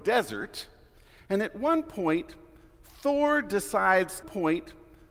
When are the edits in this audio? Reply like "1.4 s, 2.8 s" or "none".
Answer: 4.2 s